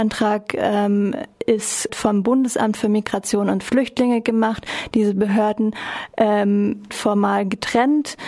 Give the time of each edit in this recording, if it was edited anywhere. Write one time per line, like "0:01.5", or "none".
0:01.9
0:06.9